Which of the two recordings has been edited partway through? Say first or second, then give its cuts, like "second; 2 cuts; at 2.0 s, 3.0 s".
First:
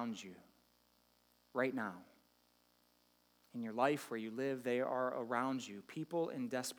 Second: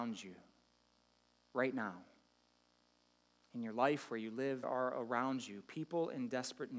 second; 1 cut; at 4.6 s